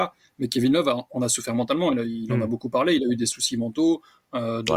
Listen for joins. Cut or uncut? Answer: uncut